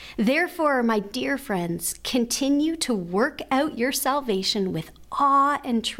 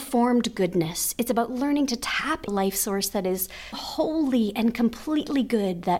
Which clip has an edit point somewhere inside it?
second; 2 cuts; at 2.5 s, 3.7 s

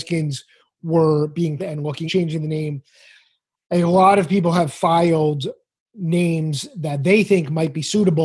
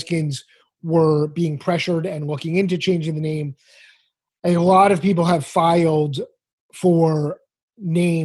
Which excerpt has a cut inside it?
first; 3 cuts; at 1.6 s, 2.1 s, 5.8 s

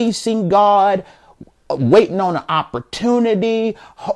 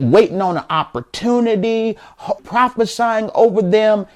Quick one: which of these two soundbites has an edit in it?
second; 1 cut; at 2.4 s

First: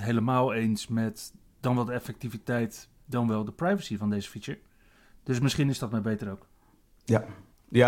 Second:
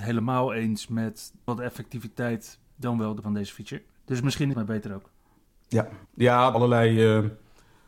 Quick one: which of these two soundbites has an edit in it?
second; 6 cuts; at 1.5 s, 3.2 s, 4.0 s, 4.5 s, 6.0 s, 6.5 s

